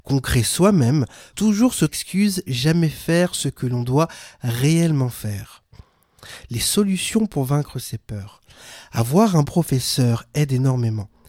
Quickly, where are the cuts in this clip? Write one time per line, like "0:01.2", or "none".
0:01.3
0:01.9
0:02.5
0:09.4

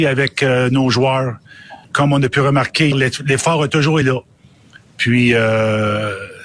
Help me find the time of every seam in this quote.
0:01.8
0:02.9
0:04.0

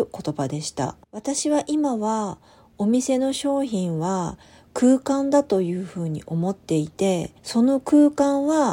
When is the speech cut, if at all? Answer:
0:01.0
0:07.4

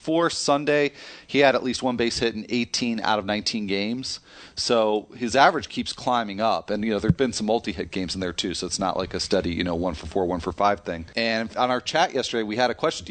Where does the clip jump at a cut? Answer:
none

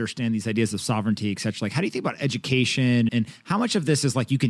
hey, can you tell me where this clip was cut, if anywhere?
0:03.1

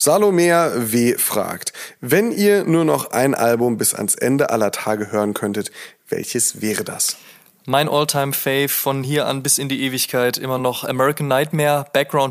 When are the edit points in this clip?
none

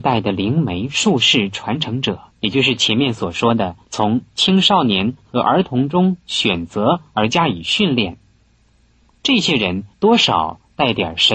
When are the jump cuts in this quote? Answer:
0:02.3
0:03.8
0:08.6
0:09.9

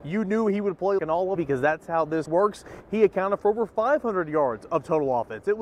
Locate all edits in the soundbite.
0:01.0
0:01.4
0:02.3

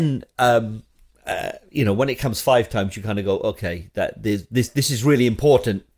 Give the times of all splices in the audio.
none

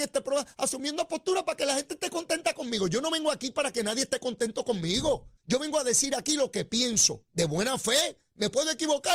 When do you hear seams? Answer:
0:05.4
0:07.3

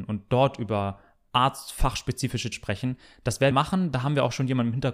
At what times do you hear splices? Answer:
0:02.5
0:03.5

